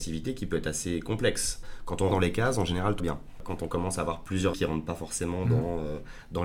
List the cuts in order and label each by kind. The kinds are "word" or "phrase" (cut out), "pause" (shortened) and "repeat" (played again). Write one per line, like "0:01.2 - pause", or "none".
0:02.1 - phrase
0:03.0 - word
0:04.5 - word